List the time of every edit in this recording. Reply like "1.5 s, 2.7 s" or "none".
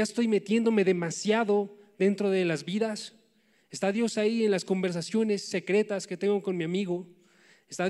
none

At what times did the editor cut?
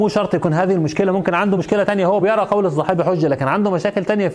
none

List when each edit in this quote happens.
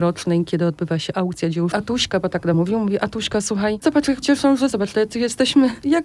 1.7 s, 2.5 s, 3.8 s, 4.2 s, 4.7 s

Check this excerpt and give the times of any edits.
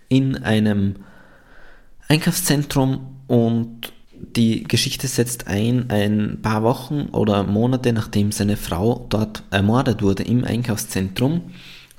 4.0 s

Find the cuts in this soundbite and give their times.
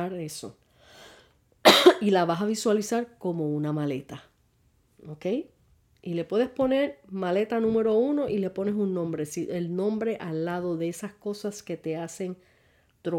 none

